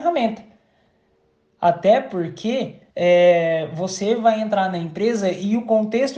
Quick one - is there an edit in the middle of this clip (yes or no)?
yes